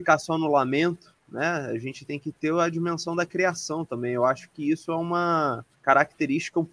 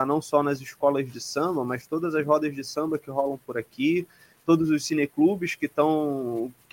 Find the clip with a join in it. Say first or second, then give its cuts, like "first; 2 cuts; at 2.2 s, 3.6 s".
first; 1 cut; at 5.7 s